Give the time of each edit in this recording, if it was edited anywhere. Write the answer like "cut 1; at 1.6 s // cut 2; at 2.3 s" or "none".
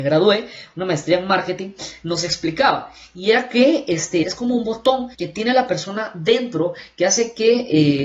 cut 1; at 4.2 s // cut 2; at 5.1 s